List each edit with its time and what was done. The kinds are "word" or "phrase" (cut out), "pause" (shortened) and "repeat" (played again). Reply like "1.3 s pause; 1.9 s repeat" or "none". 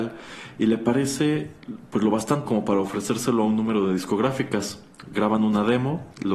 2.5 s word